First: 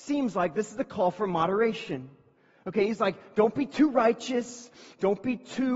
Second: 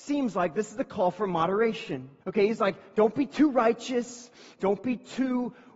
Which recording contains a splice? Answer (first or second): second